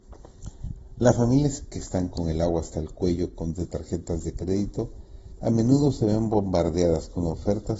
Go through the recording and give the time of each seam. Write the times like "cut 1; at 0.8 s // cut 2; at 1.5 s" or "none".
cut 1; at 3.5 s